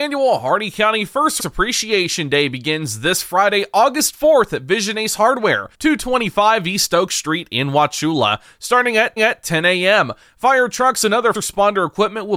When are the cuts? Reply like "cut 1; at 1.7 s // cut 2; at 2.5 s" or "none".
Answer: cut 1; at 1.4 s // cut 2; at 5.7 s // cut 3; at 9.2 s // cut 4; at 11.3 s